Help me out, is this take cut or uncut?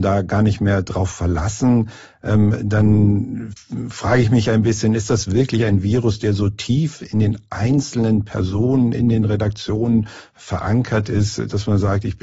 uncut